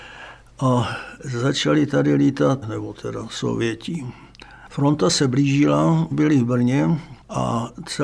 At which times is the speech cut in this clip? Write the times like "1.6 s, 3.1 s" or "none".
2.6 s, 6.1 s